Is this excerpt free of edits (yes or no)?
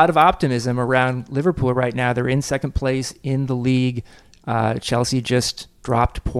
yes